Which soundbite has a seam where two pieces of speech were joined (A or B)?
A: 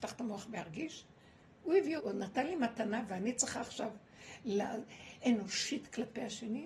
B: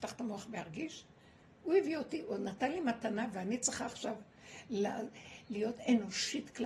A